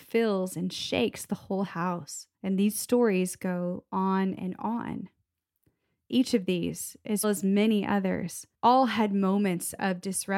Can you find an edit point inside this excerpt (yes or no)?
yes